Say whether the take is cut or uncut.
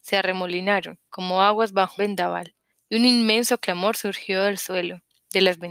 cut